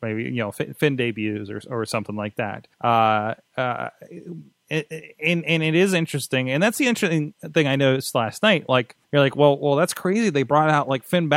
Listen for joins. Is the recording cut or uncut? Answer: cut